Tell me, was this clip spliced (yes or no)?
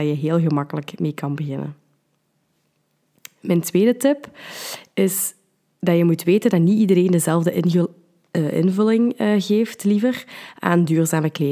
no